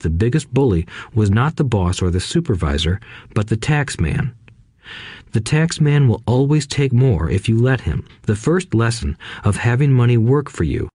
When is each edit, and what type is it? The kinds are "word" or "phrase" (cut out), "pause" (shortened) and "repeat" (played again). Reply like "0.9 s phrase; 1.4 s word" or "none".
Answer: 8.1 s pause